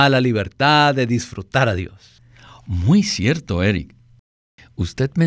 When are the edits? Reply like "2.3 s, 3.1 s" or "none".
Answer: none